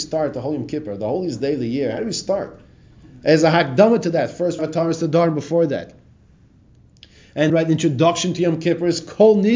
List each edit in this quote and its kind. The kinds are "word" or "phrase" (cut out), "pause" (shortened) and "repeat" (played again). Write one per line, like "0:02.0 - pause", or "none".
0:04.6 - word
0:07.5 - word